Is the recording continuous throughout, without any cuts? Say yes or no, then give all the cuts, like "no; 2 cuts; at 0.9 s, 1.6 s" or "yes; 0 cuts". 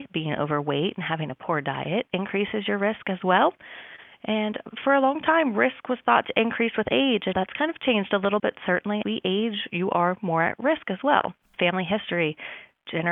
no; 3 cuts; at 7.3 s, 8.4 s, 9.0 s